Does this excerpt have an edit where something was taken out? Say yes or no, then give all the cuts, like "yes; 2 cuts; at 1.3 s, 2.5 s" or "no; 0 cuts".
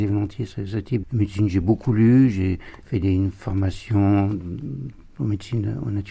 yes; 1 cut; at 1.0 s